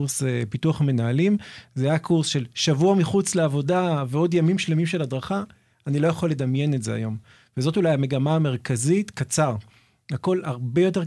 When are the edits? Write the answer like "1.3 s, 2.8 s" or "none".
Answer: none